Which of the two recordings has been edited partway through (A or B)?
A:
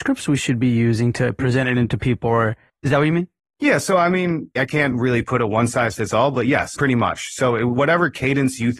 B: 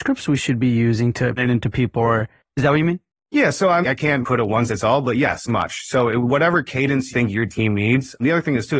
B